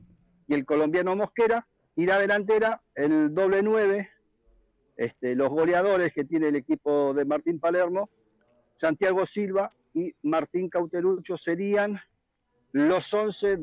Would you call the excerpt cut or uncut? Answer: cut